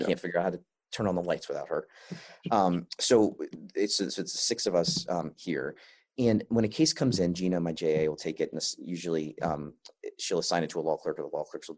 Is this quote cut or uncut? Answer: uncut